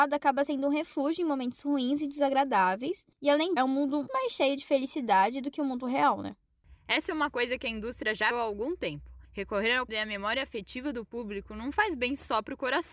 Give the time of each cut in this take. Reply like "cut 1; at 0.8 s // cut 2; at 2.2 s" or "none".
cut 1; at 3.1 s // cut 2; at 3.6 s // cut 3; at 4.1 s // cut 4; at 8.3 s // cut 5; at 9.2 s // cut 6; at 9.9 s